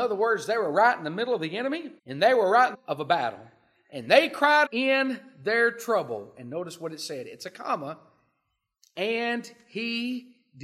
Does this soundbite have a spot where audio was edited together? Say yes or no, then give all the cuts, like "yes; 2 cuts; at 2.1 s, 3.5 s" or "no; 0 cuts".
yes; 3 cuts; at 2.0 s, 2.7 s, 4.7 s